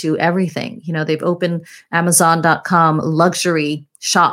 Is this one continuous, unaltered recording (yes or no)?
yes